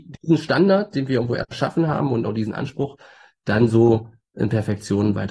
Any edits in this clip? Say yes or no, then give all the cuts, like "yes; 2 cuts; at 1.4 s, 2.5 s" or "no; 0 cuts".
no; 0 cuts